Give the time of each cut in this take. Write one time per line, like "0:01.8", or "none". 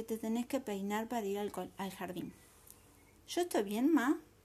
none